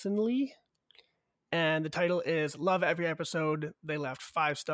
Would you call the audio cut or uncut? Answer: uncut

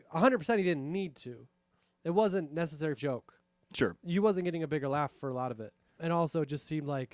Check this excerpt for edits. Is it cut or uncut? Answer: cut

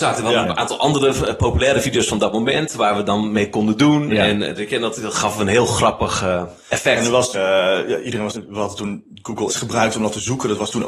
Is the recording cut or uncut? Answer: cut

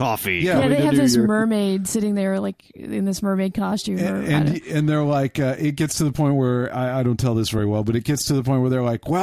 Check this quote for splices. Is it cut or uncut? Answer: uncut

